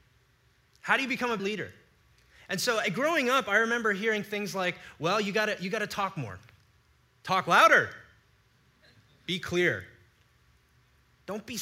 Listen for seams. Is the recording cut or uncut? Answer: cut